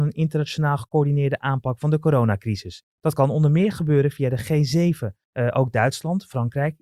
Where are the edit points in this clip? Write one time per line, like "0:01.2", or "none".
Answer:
0:02.9
0:05.2